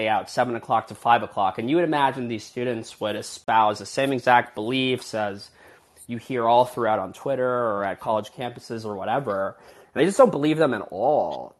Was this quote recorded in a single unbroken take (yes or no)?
yes